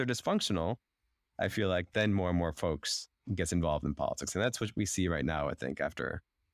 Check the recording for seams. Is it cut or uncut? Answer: uncut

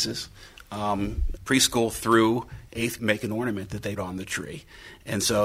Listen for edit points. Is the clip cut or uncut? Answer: cut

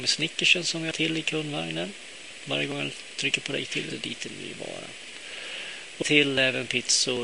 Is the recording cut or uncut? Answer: cut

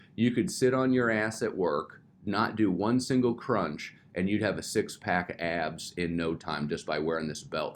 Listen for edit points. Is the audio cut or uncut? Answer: uncut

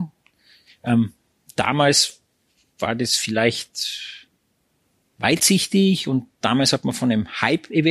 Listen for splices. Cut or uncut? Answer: uncut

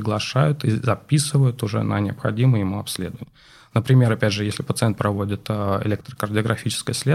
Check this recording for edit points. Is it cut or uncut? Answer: uncut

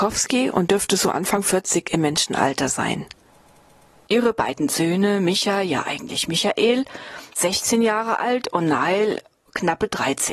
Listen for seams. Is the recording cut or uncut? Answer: cut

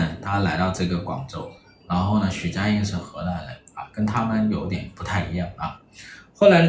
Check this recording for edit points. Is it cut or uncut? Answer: uncut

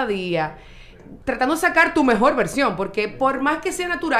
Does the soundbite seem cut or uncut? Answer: cut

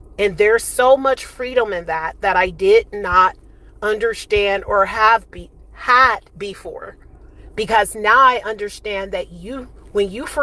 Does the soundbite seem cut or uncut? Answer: cut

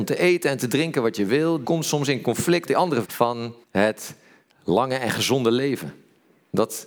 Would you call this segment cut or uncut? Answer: cut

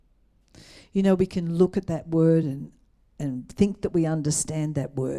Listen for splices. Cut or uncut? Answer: uncut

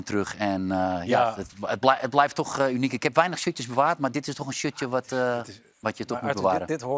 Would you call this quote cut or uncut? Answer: uncut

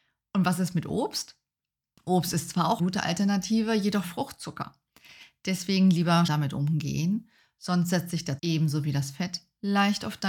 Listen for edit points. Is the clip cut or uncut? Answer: cut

